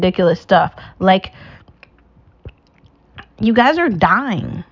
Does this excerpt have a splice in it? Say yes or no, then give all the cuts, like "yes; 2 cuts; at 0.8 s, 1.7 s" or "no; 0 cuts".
no; 0 cuts